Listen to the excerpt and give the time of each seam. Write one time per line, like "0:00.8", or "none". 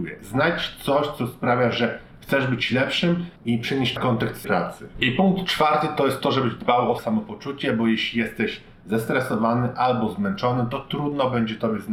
0:03.4
0:04.0
0:04.4
0:07.0